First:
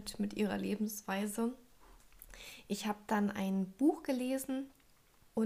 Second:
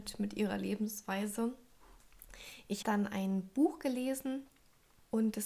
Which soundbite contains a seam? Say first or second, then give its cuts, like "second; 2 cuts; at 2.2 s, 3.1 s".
second; 1 cut; at 2.8 s